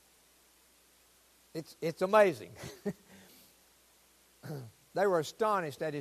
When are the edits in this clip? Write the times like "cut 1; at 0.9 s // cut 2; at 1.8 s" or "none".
none